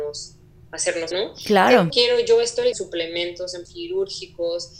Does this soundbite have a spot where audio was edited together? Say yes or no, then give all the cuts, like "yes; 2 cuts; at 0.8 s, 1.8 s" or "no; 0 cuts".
yes; 4 cuts; at 1.1 s, 1.9 s, 2.7 s, 3.7 s